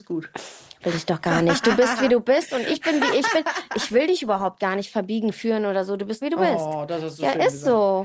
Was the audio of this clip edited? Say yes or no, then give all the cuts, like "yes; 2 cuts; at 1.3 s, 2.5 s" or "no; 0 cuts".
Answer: yes; 1 cut; at 6.2 s